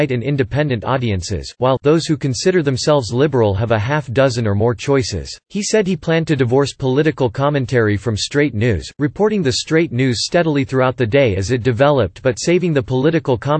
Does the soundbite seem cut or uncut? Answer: cut